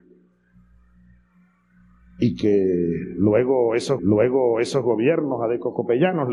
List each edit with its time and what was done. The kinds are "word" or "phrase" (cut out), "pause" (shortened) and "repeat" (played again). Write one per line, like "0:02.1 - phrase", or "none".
0:04.0 - repeat